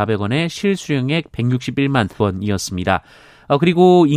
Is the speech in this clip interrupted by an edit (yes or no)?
yes